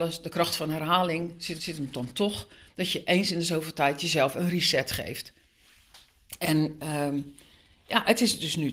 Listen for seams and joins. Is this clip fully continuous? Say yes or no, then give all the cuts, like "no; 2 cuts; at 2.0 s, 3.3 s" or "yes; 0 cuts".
no; 1 cut; at 1.6 s